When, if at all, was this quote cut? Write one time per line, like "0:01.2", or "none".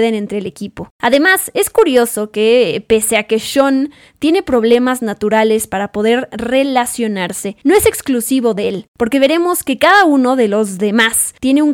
none